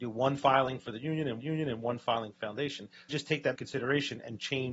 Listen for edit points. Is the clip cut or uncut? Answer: cut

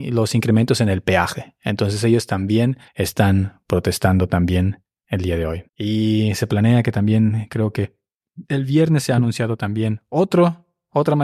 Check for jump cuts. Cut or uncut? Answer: cut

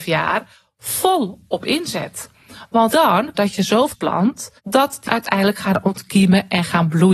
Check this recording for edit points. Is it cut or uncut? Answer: cut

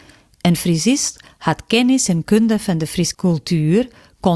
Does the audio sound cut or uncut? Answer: cut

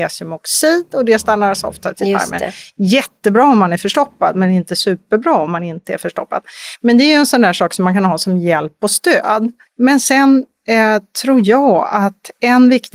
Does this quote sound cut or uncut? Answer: cut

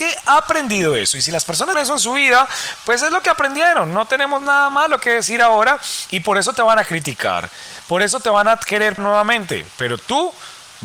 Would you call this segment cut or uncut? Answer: cut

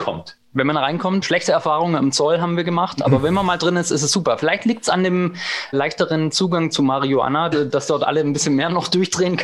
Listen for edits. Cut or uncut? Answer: cut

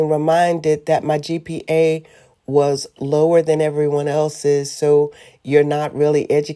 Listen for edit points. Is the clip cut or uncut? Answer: uncut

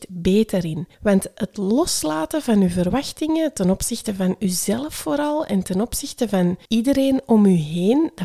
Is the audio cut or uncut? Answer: cut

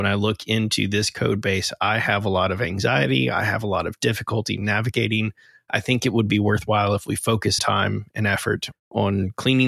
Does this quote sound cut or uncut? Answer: cut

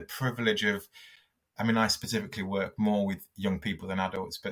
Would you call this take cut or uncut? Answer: uncut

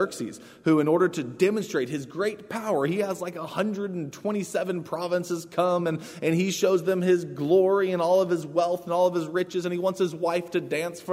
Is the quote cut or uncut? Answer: uncut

